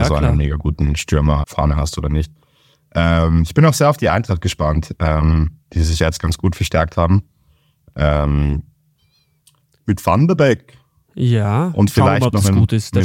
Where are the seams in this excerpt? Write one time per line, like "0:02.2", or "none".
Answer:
0:01.4
0:05.6
0:06.0

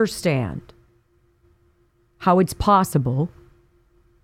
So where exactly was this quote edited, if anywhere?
none

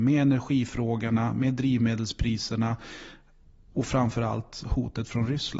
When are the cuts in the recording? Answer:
none

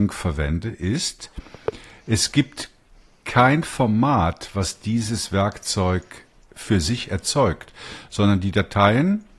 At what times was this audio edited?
none

